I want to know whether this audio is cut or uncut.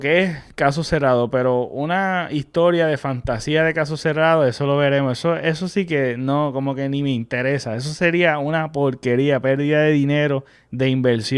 uncut